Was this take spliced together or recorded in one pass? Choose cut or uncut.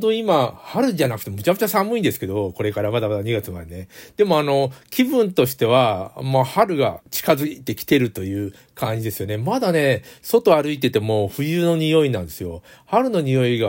uncut